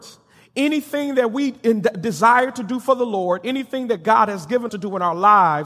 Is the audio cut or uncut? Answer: cut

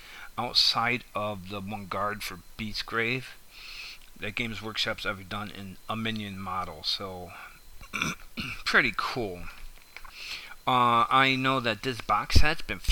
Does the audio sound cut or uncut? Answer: cut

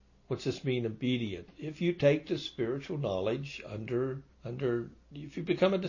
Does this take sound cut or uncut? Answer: cut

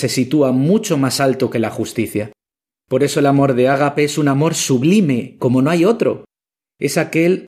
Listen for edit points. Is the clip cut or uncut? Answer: uncut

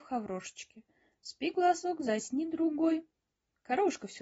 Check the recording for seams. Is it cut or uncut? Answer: uncut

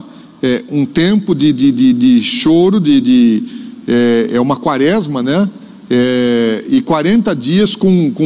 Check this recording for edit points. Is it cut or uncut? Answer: uncut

